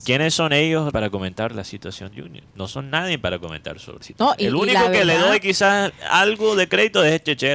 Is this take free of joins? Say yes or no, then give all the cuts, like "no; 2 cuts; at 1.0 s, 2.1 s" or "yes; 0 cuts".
no; 5 cuts; at 0.9 s, 1.5 s, 2.1 s, 2.5 s, 4.0 s